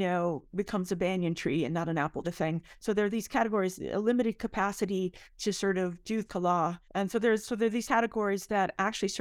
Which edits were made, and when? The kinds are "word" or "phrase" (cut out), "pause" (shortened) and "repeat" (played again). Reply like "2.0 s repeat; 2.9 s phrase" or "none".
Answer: 2.2 s phrase; 6.3 s word; 6.8 s pause; 7.8 s word